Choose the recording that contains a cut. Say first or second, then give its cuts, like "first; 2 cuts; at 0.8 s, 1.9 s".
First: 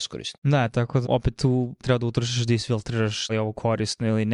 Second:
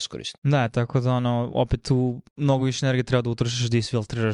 first; 3 cuts; at 1.0 s, 1.8 s, 3.3 s